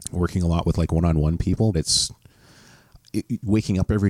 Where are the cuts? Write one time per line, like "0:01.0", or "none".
0:01.7